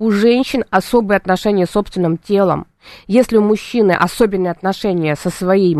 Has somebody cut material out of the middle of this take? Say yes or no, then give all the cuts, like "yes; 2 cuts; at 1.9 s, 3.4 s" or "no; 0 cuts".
no; 0 cuts